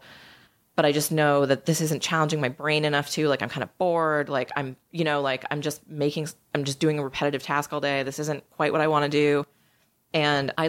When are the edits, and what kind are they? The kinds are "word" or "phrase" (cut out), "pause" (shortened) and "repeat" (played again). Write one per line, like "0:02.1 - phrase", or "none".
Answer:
none